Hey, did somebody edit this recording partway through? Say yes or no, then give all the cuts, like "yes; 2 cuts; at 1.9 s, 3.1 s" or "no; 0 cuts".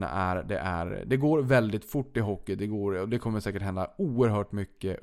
no; 0 cuts